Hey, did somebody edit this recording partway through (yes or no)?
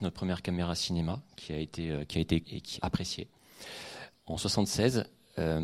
yes